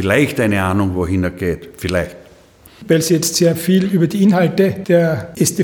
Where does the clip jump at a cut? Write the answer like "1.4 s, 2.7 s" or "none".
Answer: none

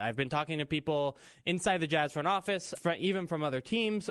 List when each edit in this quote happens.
2.7 s

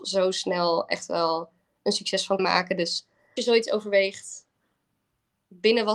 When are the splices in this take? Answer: 2.4 s, 3.4 s

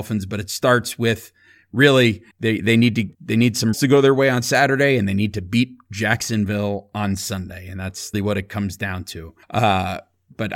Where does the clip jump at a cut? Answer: 2.3 s, 3.1 s, 3.7 s, 8.1 s, 9.4 s

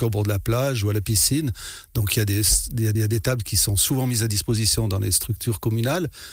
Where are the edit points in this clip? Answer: 2.9 s

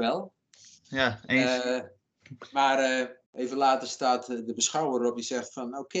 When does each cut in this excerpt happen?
3.3 s

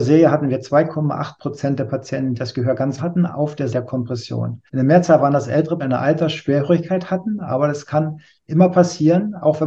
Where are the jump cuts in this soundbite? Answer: 2.3 s, 3.0 s, 3.7 s, 4.7 s, 5.8 s

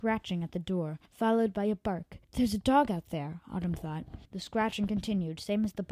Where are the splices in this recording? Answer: 1.0 s, 2.2 s, 4.2 s

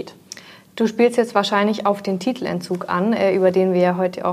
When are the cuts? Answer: none

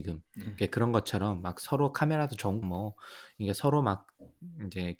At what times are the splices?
2.6 s

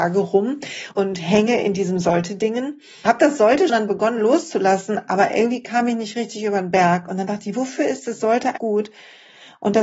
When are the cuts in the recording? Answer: 0.9 s, 3.1 s, 3.7 s, 8.6 s

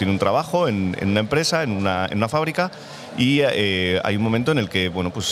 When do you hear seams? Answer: none

